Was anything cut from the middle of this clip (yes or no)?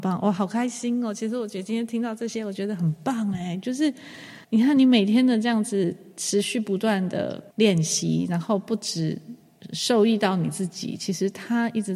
yes